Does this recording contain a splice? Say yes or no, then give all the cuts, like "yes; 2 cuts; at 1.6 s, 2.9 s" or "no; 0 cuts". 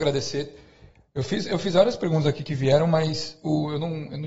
no; 0 cuts